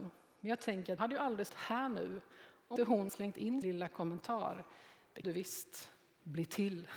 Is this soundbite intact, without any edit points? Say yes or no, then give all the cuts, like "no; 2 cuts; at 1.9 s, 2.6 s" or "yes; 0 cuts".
no; 6 cuts; at 1.0 s, 1.5 s, 2.8 s, 3.1 s, 3.6 s, 5.2 s